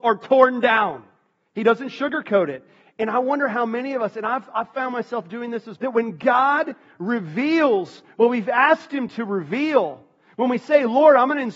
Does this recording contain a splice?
yes; 1 cut; at 5.8 s

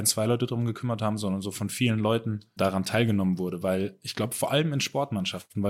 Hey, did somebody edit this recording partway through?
yes; 1 cut; at 2.6 s

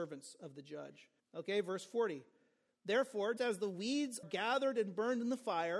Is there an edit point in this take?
yes; 3 cuts; at 1.2 s, 3.4 s, 4.2 s

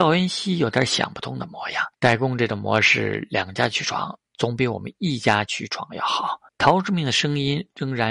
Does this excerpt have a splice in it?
yes; 2 cuts; at 1.9 s, 6.5 s

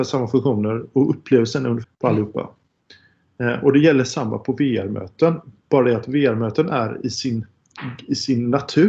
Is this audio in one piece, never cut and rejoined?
no; 1 cut; at 1.8 s

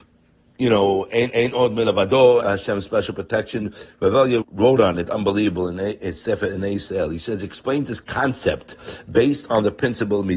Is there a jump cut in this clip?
yes; 3 cuts; at 1.3 s, 2.4 s, 4.4 s

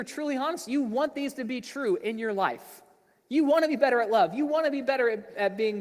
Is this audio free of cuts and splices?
yes; 0 cuts

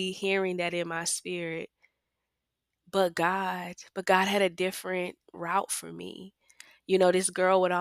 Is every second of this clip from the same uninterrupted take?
yes; 0 cuts

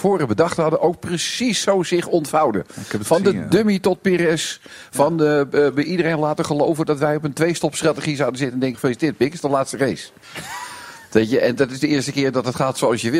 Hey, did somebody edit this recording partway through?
yes; 1 cut; at 8.7 s

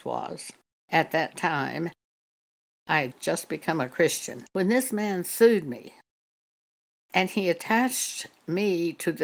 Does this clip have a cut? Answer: no; 0 cuts

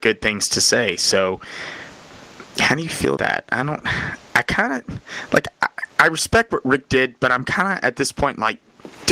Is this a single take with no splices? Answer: no; 1 cut; at 3.2 s

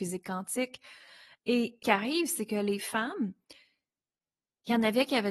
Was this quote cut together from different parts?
yes; 1 cut; at 1.8 s

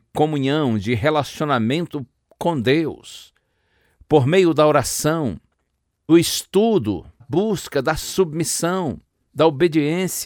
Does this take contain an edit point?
yes; 2 cuts; at 6.1 s, 7.2 s

